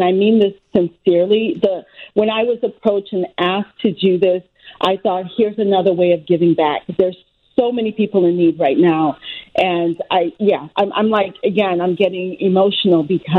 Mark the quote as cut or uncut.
uncut